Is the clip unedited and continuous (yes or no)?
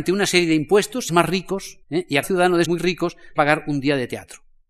no